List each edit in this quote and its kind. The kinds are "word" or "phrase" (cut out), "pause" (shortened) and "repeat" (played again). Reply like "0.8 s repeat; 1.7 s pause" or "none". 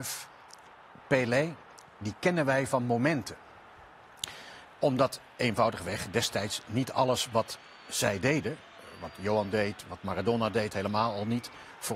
4.7 s pause; 9.8 s word